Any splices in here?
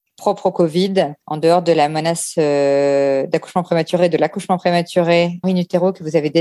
yes; 2 cuts; at 1.2 s, 5.4 s

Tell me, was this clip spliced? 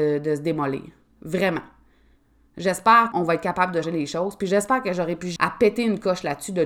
yes; 3 cuts; at 3.1 s, 3.8 s, 5.4 s

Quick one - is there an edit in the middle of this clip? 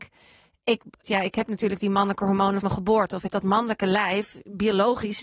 yes; 3 cuts; at 1.0 s, 2.6 s, 3.3 s

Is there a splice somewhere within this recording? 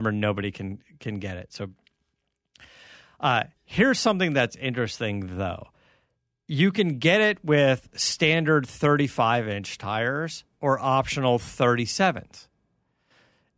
no; 0 cuts

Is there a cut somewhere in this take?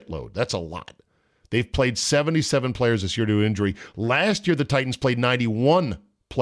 no; 0 cuts

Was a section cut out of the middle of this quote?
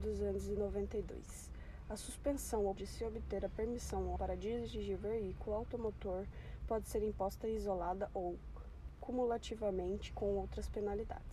yes; 2 cuts; at 2.8 s, 4.2 s

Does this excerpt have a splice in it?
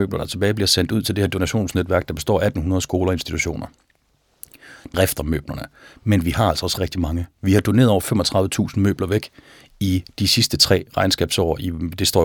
yes; 2 cuts; at 4.9 s, 6.8 s

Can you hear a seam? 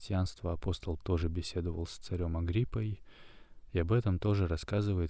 yes; 1 cut; at 1.0 s

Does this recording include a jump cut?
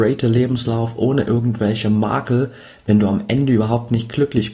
no; 0 cuts

